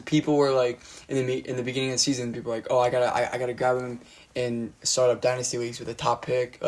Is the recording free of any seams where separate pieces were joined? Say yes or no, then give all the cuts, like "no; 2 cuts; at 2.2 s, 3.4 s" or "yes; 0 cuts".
yes; 0 cuts